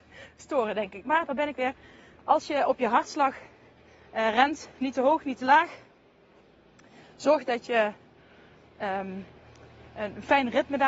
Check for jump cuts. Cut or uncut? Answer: uncut